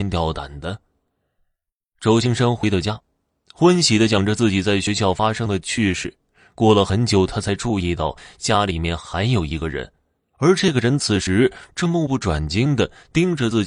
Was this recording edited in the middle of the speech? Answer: no; 0 cuts

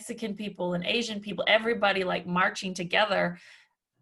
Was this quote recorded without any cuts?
yes; 0 cuts

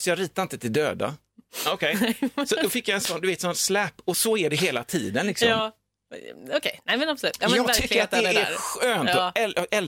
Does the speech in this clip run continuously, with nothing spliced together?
yes; 0 cuts

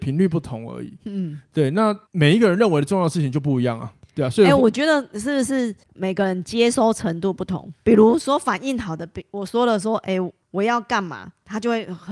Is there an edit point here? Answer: yes; 4 cuts; at 2.1 s, 4.0 s, 5.8 s, 10.4 s

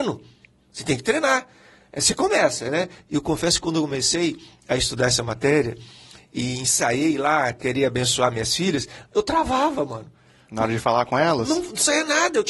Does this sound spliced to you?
no; 0 cuts

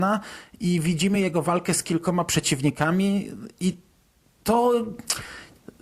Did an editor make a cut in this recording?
no; 0 cuts

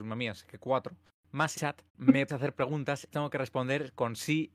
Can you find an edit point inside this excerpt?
yes; 4 cuts; at 1.5 s, 1.9 s, 2.3 s, 3.1 s

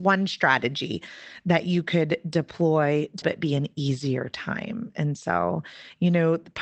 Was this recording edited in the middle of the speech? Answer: yes; 1 cut; at 3.2 s

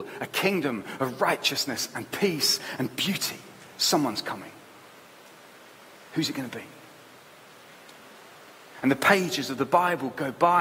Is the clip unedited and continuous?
yes; 0 cuts

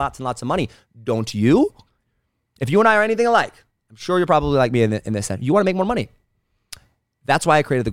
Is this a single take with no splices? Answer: yes; 0 cuts

